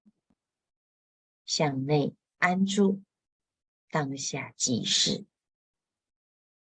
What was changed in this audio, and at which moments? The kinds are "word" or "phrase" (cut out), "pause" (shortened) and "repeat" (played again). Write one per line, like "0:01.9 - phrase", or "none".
none